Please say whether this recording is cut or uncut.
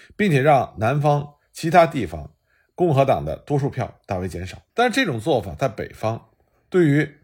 cut